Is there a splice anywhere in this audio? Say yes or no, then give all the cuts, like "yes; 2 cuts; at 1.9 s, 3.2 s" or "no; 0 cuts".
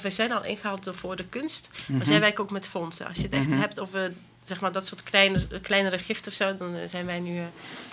no; 0 cuts